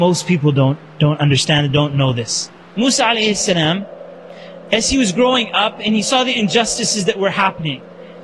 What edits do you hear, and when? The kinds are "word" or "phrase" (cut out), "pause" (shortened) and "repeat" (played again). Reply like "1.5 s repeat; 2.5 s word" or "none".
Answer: none